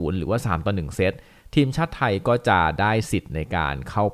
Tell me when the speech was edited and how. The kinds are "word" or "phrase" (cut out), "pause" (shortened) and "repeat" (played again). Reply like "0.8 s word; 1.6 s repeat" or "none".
none